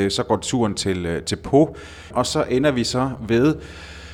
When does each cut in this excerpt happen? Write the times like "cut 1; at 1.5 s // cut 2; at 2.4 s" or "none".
cut 1; at 2.1 s